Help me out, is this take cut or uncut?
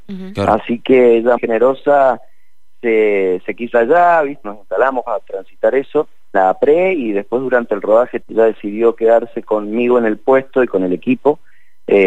cut